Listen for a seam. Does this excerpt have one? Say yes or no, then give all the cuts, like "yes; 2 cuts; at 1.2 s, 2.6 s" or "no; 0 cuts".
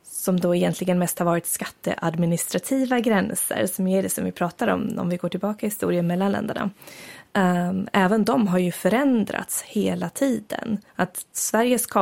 yes; 1 cut; at 10.9 s